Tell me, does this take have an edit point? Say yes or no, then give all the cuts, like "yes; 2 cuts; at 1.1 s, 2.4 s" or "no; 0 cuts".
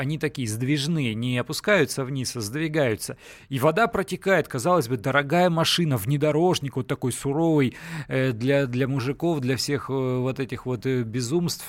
no; 0 cuts